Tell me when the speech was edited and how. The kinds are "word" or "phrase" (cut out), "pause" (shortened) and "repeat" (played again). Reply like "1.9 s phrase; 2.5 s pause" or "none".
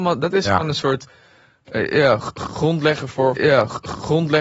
3.4 s repeat